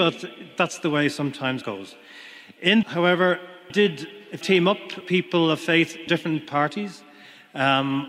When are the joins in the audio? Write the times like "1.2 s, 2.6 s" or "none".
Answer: 1.6 s, 2.8 s, 3.7 s, 4.4 s, 5.0 s, 6.1 s, 6.4 s